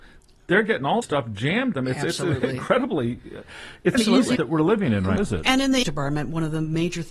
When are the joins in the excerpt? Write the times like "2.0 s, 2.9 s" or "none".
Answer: 1.0 s, 1.7 s, 3.9 s, 4.4 s, 5.2 s, 5.8 s